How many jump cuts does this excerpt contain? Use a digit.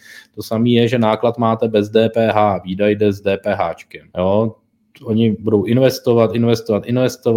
1